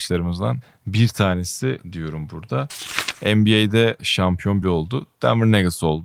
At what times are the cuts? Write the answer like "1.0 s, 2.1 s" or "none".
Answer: 1.8 s, 4.0 s, 4.6 s